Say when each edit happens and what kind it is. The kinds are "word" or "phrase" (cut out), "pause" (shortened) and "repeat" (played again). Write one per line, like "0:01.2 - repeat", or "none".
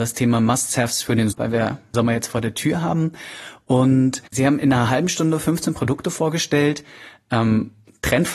0:01.3 - word
0:01.9 - phrase
0:04.3 - pause

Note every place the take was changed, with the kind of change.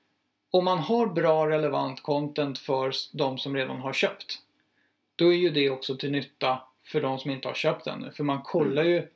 none

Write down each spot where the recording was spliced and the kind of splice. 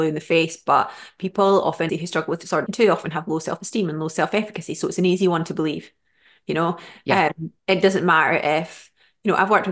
0:01.9 - word
0:02.7 - word

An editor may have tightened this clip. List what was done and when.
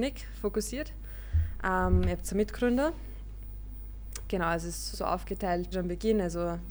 0:04.9 - word
0:05.7 - word

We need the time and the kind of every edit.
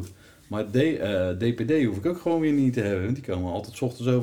none

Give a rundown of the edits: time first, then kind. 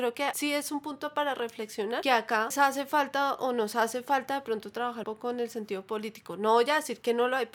0:02.5 - word
0:05.0 - word

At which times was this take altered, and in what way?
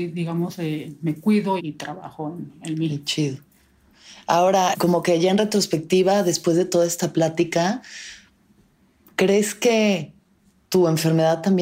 0:01.6 - word

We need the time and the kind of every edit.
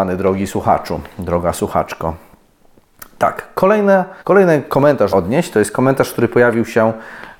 0:04.2 - pause
0:05.1 - phrase

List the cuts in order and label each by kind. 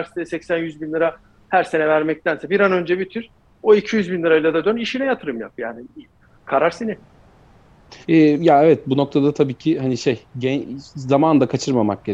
0:06.2 - pause
0:08.0 - pause

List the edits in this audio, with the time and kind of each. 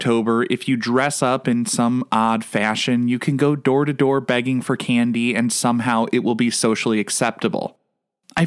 none

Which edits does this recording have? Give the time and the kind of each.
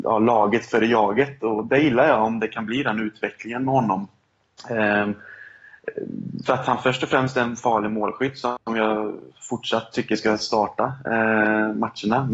0:06.5 - word

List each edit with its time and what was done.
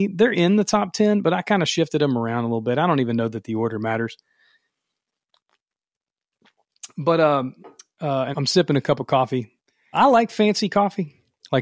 0:08.3 - word
0:09.9 - word

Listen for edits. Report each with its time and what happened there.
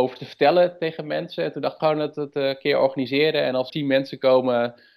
0:01.8 - phrase
0:03.7 - word

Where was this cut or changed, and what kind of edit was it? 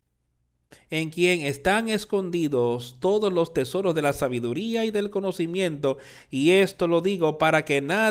none

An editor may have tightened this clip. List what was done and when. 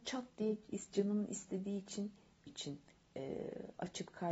0:02.5 - phrase

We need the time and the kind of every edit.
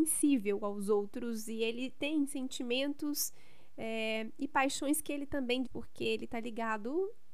0:05.6 - word

